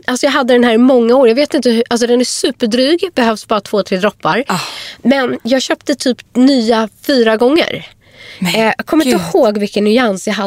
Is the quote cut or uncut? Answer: cut